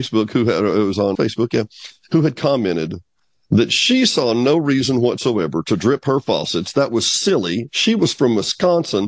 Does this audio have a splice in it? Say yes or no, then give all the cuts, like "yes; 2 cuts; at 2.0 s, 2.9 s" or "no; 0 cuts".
yes; 1 cut; at 1.1 s